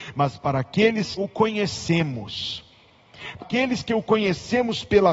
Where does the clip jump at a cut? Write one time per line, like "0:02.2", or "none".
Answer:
0:01.2
0:03.4